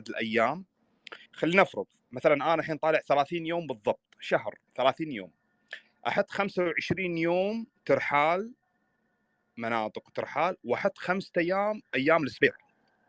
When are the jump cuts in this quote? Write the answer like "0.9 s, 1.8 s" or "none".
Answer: 1.3 s, 4.7 s, 7.8 s, 11.9 s